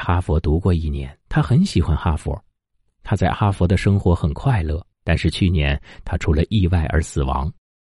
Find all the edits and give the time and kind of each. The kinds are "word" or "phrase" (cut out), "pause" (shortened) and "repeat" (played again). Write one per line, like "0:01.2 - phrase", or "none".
0:01.2 - pause
0:04.9 - pause